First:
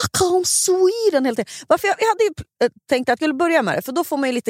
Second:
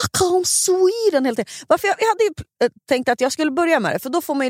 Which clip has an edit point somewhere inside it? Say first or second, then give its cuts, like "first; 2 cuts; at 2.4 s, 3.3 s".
first; 1 cut; at 3.2 s